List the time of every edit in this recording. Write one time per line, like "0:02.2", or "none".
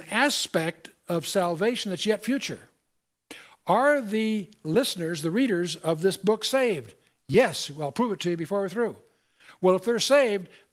none